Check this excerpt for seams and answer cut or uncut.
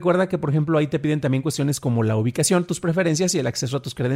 uncut